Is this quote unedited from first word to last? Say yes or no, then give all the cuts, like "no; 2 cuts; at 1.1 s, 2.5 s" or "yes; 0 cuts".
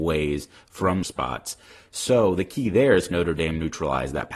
no; 2 cuts; at 1.0 s, 3.1 s